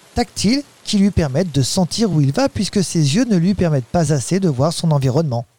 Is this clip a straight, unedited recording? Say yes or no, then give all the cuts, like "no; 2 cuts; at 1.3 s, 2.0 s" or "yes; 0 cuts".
yes; 0 cuts